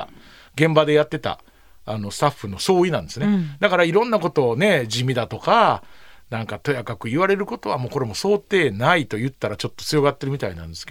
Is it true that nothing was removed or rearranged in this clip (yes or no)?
yes